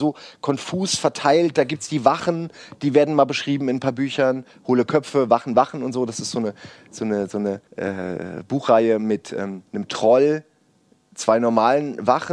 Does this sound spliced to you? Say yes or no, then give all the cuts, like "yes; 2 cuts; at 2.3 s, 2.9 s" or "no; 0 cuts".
yes; 2 cuts; at 7.7 s, 9.7 s